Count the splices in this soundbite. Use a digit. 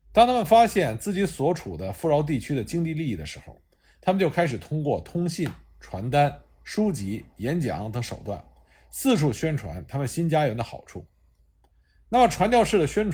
0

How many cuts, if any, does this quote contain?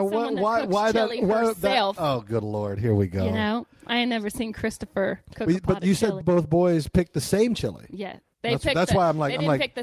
2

